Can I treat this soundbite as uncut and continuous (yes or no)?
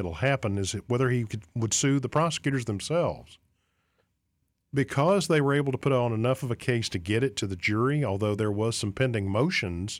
yes